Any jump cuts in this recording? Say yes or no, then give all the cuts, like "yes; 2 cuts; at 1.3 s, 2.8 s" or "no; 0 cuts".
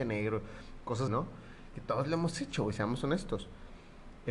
yes; 1 cut; at 1.1 s